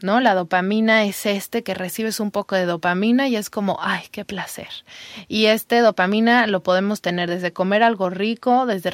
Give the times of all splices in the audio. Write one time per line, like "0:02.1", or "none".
none